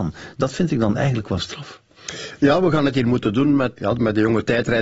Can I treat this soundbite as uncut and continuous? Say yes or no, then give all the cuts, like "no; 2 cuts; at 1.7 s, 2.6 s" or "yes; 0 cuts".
no; 1 cut; at 3.8 s